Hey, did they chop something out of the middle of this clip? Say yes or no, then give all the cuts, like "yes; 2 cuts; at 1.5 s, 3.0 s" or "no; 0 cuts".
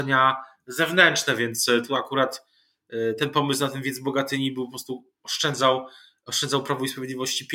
no; 0 cuts